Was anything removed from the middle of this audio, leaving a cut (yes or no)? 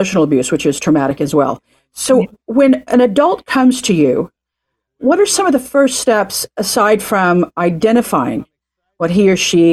no